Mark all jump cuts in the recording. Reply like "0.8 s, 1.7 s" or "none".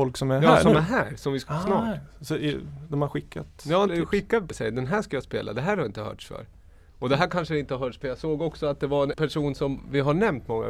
1.5 s, 3.9 s, 4.5 s, 8.0 s, 9.1 s

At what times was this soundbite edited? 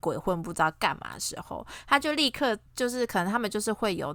2.7 s

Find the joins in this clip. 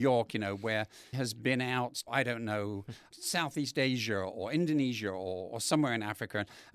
1.1 s, 2.1 s, 3.1 s

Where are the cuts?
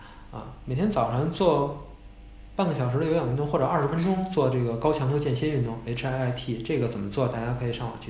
none

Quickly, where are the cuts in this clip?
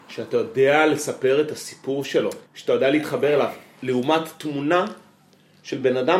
2.5 s

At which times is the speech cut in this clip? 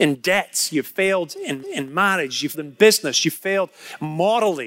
1.6 s, 2.5 s

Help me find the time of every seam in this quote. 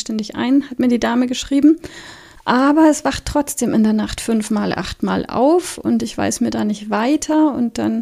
2.4 s

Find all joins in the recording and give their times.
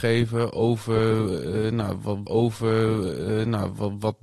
2.3 s

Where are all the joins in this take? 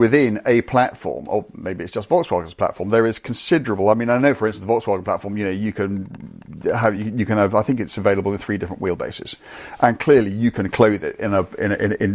none

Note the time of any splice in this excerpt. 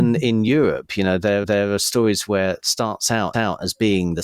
1.4 s, 2.6 s, 3.3 s

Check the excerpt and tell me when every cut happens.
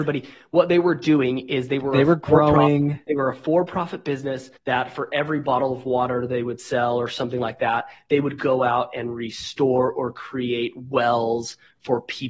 4.6 s

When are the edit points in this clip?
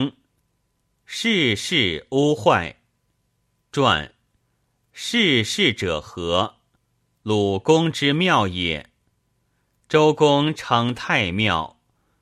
none

